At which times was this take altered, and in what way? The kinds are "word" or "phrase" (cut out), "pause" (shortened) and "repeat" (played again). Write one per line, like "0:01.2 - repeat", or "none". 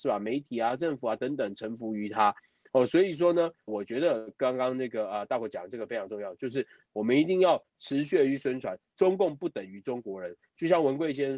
0:03.7 - word